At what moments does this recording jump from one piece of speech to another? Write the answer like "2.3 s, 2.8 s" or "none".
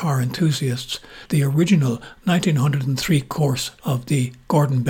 1.3 s, 3.8 s